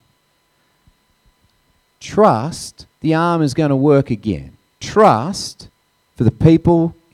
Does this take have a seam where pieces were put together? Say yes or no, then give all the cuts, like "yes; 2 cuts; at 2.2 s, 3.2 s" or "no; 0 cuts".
yes; 2 cuts; at 2.9 s, 4.7 s